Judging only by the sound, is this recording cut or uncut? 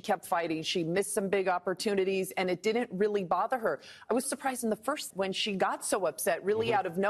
cut